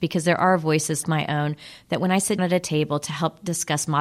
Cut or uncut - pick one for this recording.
cut